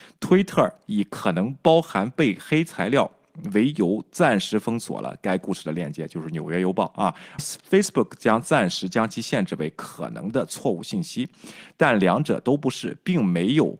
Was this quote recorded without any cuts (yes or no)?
no